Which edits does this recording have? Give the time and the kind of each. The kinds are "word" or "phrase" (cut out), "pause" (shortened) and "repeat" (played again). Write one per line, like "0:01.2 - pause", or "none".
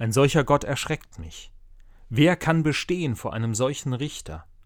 none